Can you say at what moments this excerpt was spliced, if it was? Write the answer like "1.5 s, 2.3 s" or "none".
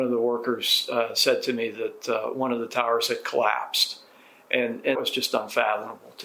4.9 s

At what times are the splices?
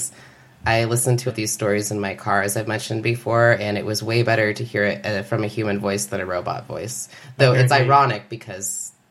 1.3 s

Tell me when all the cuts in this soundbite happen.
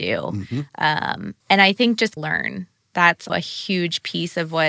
1.4 s, 2.2 s, 3.3 s

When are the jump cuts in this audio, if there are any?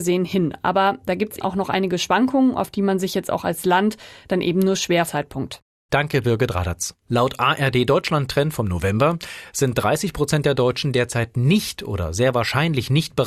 1.4 s, 5.1 s, 7.0 s

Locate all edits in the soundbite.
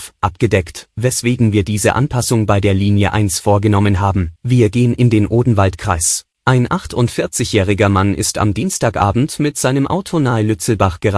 4.4 s, 6.3 s

